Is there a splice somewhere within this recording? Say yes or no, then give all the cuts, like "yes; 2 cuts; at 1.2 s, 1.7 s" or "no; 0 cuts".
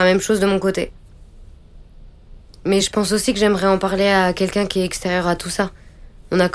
no; 0 cuts